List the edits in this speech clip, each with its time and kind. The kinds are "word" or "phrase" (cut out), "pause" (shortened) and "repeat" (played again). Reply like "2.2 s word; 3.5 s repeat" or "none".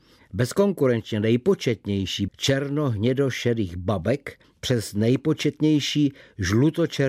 2.3 s phrase; 4.4 s pause